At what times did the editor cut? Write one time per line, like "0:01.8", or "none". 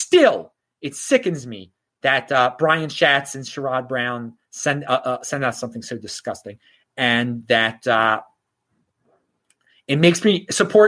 none